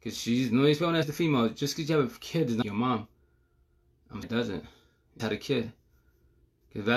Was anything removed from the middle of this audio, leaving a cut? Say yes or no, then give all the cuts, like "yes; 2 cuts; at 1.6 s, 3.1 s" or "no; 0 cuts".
yes; 4 cuts; at 1.0 s, 2.6 s, 4.2 s, 5.2 s